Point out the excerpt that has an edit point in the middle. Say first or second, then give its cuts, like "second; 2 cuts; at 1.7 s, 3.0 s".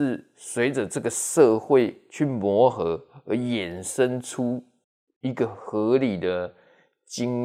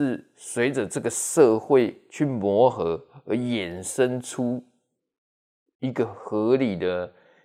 first; 1 cut; at 4.8 s